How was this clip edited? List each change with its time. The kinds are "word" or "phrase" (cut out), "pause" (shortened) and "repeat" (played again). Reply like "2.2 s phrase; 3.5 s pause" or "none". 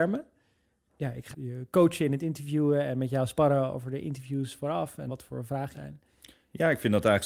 1.3 s word; 5.1 s word; 5.7 s word